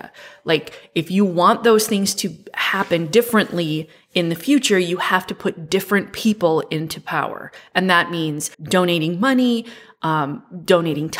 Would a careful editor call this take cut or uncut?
cut